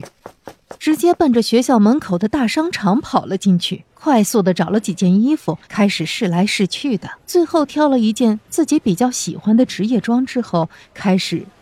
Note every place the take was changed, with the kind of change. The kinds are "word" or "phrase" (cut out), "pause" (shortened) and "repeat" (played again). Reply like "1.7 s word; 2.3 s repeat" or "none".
3.9 s pause; 5.6 s pause; 7.2 s pause